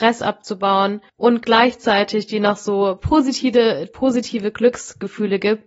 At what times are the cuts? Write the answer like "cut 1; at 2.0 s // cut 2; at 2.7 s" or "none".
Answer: cut 1; at 1.1 s